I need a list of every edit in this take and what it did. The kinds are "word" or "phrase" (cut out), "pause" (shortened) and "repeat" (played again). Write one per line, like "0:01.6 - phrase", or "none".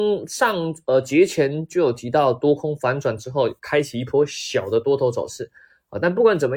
0:03.6 - pause